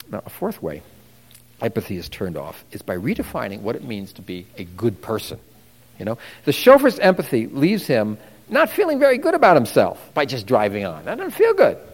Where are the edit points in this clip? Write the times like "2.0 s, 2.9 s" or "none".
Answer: 10.1 s